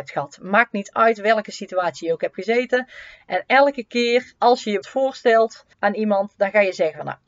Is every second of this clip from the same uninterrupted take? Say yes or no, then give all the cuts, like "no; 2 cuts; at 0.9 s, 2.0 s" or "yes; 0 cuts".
no; 3 cuts; at 4.4 s, 4.8 s, 5.7 s